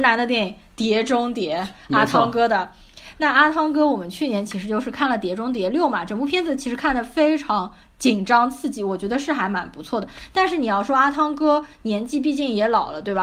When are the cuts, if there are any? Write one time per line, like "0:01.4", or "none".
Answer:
none

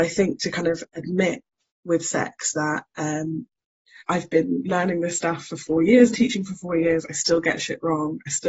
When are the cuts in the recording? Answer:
0:04.0
0:06.1

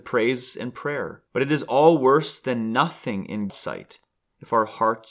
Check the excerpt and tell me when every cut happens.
0:01.3
0:03.5

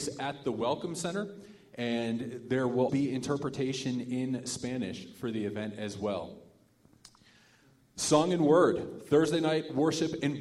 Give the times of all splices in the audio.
0:02.9

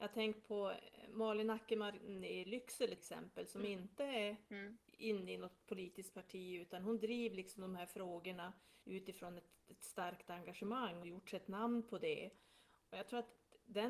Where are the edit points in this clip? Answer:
0:03.0
0:08.8
0:11.0

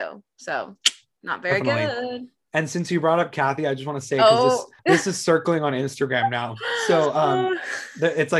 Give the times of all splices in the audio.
0:04.8

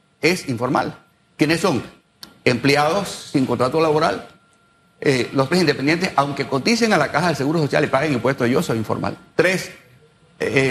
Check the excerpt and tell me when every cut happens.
0:05.5

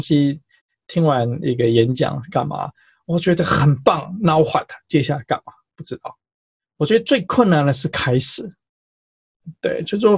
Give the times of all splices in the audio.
none

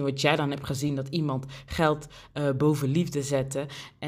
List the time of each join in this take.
none

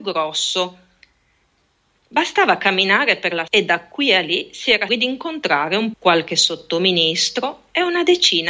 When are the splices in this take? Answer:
0:03.5
0:04.9
0:05.9

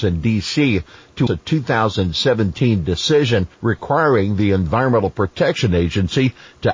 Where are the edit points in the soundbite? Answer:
0:01.3
0:03.5

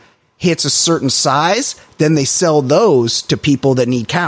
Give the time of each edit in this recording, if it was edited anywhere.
none

